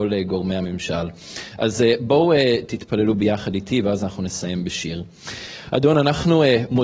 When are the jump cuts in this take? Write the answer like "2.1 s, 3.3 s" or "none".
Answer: none